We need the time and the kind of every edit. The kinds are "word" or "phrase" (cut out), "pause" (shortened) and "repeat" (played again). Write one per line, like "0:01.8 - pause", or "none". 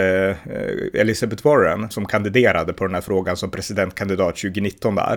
0:01.9 - word